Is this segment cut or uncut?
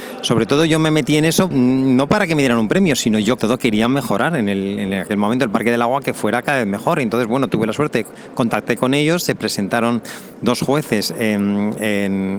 cut